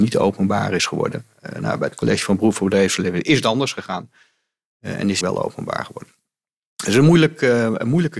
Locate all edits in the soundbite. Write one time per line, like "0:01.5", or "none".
0:05.2